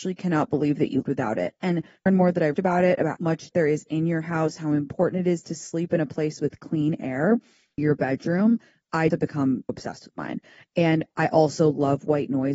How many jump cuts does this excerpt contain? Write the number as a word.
eight